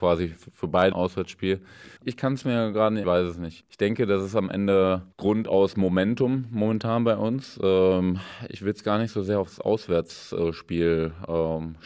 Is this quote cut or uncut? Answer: cut